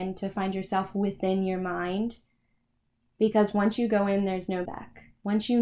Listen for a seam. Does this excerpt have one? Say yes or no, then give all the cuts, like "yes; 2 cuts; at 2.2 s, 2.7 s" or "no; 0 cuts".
yes; 1 cut; at 4.7 s